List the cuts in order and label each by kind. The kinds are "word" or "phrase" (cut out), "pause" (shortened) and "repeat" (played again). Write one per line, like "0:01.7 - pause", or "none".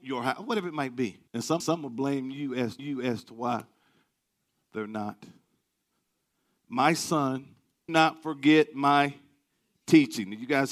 0:01.3 - pause
0:01.6 - repeat
0:02.8 - repeat
0:06.2 - pause
0:07.9 - word